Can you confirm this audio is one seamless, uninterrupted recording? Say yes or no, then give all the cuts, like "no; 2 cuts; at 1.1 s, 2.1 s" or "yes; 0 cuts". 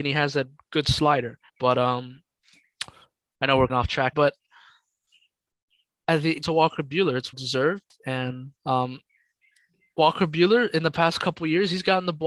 no; 6 cuts; at 1.5 s, 3.7 s, 4.1 s, 6.4 s, 7.3 s, 8.6 s